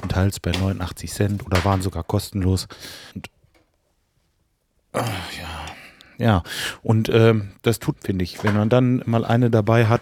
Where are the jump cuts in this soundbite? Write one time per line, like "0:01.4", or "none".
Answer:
0:03.1
0:07.9
0:09.0